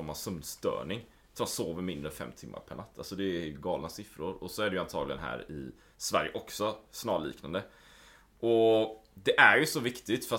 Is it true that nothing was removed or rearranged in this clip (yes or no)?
yes